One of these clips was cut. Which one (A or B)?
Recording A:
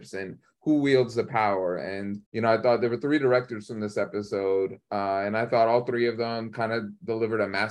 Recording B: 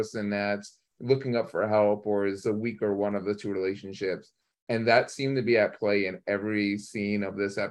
A